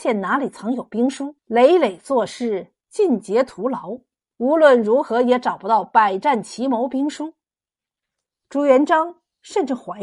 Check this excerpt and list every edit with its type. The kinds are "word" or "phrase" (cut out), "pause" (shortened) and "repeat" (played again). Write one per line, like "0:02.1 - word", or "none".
0:01.4 - pause
0:04.2 - pause